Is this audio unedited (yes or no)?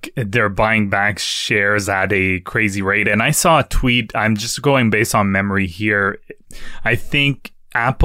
yes